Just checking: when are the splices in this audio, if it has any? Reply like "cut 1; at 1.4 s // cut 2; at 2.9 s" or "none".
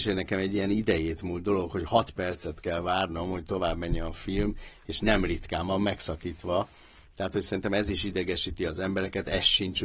none